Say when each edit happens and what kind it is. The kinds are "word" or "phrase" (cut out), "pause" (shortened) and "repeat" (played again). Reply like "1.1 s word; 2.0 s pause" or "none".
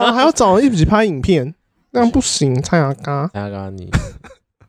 none